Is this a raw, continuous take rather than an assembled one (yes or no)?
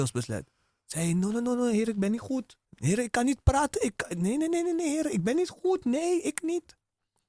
no